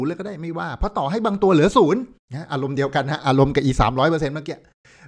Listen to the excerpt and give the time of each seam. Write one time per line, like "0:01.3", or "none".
0:02.2